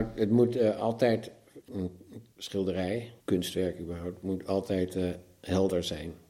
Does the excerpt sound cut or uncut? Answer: cut